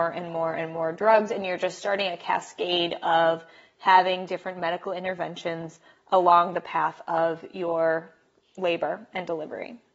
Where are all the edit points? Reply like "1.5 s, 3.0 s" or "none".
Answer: none